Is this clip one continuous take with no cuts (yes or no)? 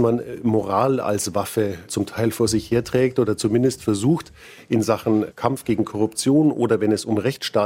yes